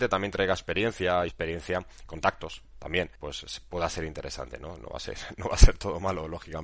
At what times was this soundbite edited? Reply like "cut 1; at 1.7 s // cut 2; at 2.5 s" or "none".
cut 1; at 1.3 s // cut 2; at 3.2 s